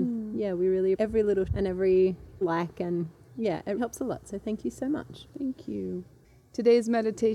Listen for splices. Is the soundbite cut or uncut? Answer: cut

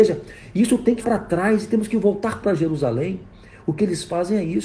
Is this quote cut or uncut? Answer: cut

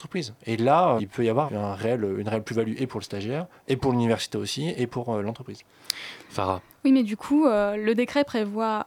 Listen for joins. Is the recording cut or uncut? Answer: cut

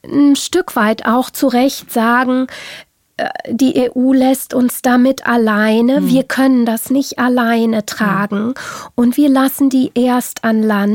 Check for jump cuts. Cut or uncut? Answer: uncut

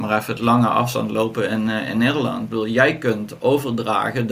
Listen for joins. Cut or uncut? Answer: uncut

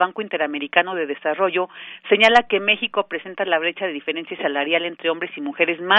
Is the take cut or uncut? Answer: uncut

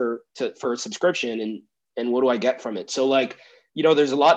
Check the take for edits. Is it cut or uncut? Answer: uncut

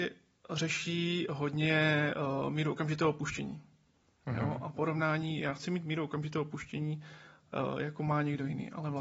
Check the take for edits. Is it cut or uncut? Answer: uncut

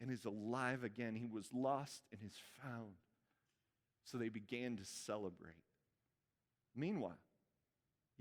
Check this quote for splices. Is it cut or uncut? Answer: uncut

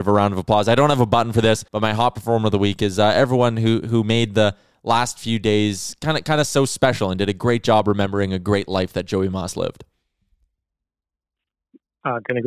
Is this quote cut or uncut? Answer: cut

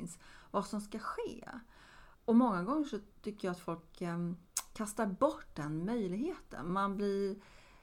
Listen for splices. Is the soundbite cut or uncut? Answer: cut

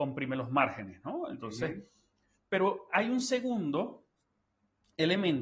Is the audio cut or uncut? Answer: uncut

